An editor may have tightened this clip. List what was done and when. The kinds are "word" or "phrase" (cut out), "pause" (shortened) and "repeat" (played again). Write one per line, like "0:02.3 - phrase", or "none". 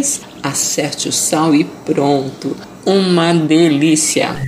none